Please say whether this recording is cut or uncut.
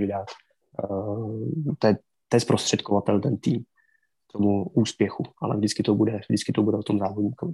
uncut